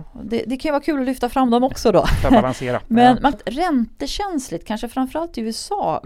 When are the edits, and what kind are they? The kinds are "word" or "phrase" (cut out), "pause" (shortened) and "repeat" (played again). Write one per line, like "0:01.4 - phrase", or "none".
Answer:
0:03.3 - phrase

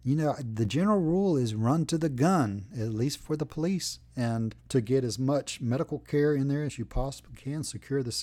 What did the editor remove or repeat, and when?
0:04.6 - pause

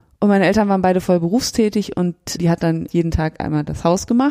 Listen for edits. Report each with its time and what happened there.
0:02.4 - word
0:02.9 - word

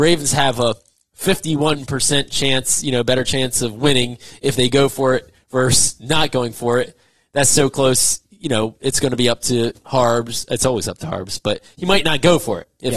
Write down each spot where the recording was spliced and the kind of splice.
none

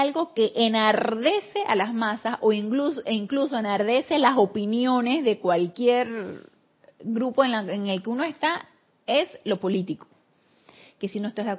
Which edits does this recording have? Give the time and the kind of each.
none

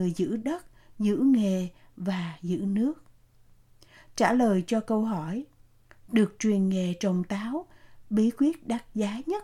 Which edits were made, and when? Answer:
none

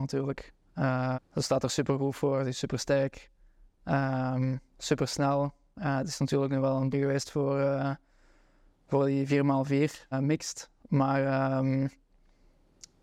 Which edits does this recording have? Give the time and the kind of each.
0:01.1 - word
0:06.9 - word
0:10.1 - word

